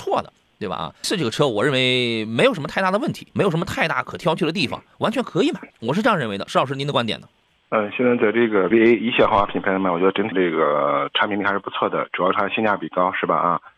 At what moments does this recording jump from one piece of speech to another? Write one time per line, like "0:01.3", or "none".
0:01.0
0:03.3
0:05.7
0:07.4
0:08.7
0:10.3